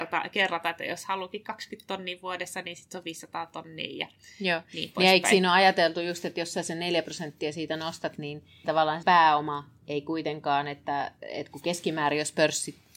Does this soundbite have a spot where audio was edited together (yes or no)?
yes